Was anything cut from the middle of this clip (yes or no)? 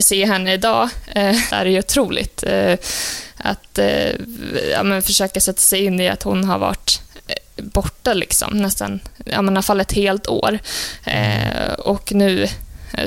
yes